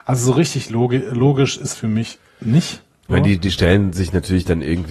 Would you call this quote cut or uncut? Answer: cut